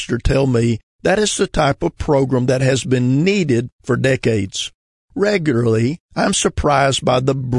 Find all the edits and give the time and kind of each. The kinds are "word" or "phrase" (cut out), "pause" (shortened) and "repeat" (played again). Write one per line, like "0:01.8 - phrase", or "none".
none